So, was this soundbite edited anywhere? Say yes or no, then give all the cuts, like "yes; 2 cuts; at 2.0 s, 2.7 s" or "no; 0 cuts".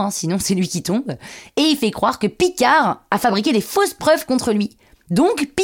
no; 0 cuts